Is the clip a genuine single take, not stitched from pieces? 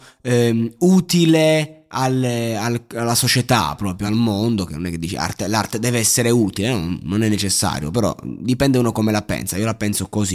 yes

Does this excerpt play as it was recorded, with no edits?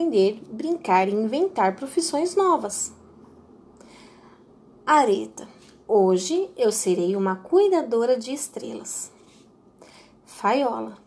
yes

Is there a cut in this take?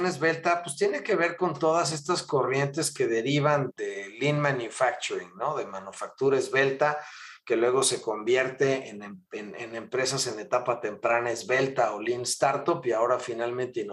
yes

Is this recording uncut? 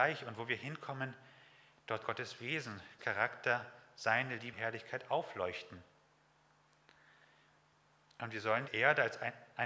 no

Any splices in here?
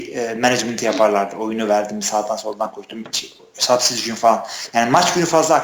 yes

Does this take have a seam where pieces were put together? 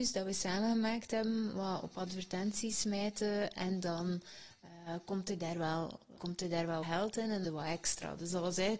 yes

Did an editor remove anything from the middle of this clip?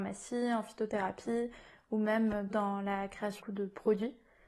yes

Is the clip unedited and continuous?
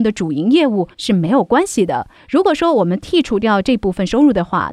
no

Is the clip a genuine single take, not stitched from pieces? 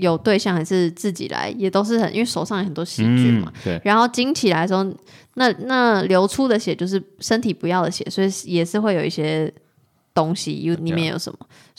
no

